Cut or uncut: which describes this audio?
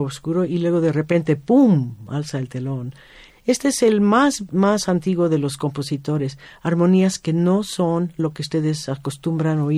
uncut